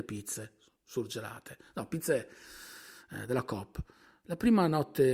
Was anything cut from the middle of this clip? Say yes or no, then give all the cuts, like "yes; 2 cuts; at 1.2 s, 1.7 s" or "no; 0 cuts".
no; 0 cuts